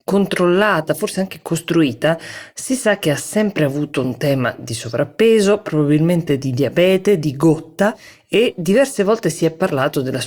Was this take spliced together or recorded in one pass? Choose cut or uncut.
uncut